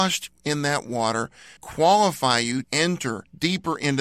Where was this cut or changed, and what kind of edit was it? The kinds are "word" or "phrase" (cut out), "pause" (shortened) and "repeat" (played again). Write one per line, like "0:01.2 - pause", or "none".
0:01.6 - word
0:02.6 - word

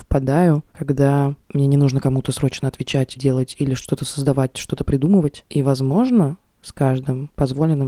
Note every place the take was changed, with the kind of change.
0:03.2 - word

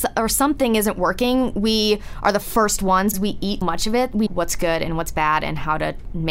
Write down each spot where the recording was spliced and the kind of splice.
0:03.1 - word
0:03.6 - word
0:04.3 - word

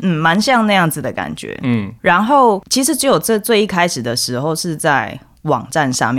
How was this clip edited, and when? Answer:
none

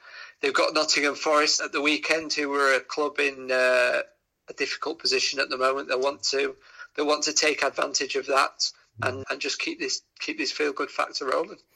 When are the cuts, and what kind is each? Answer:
0:01.6 - word
0:09.2 - word

